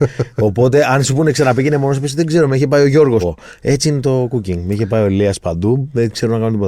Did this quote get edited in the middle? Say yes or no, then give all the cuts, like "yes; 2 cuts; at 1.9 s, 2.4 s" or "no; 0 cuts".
yes; 1 cut; at 3.2 s